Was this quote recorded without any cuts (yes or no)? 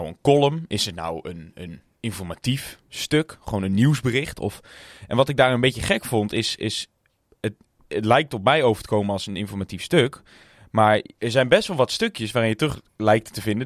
yes